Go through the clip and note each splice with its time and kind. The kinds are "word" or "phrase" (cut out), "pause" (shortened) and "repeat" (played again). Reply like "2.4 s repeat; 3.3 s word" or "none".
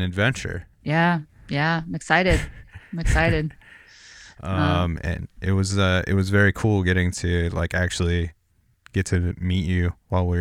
none

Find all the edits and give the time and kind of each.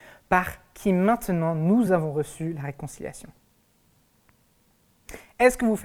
none

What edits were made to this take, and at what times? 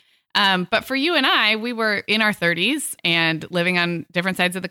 3.0 s word

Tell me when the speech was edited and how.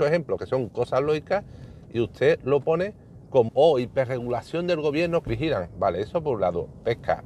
3.5 s word; 5.3 s phrase

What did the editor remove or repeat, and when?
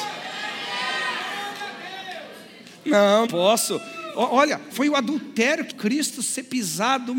3.3 s word; 4.7 s word; 5.7 s word

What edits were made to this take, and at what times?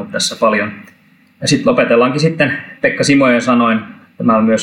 none

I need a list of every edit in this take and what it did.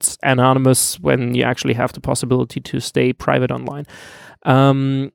none

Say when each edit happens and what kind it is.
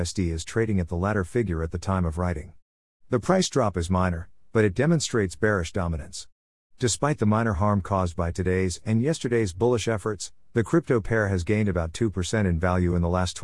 none

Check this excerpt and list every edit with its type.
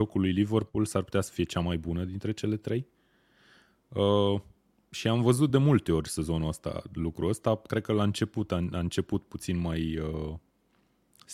none

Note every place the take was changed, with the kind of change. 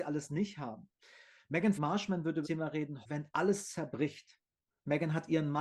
1.7 s word; 2.4 s word; 3.0 s word

